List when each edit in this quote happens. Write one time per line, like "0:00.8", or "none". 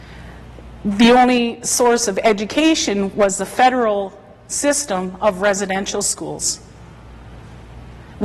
none